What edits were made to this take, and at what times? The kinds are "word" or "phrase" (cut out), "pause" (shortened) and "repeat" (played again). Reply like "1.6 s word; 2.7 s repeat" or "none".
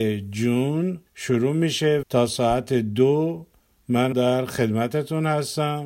1.1 s pause; 2.0 s word; 4.1 s word